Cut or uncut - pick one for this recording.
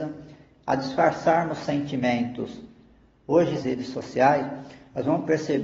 cut